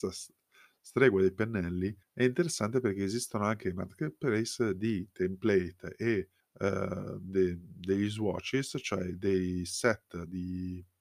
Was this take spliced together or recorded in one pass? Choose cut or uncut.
cut